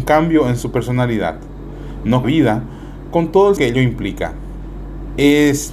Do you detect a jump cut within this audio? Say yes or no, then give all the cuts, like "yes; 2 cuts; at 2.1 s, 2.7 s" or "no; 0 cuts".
yes; 2 cuts; at 2.2 s, 3.6 s